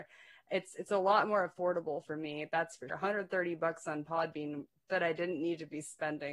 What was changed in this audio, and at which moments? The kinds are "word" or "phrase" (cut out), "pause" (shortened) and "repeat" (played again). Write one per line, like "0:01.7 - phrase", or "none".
0:02.9 - word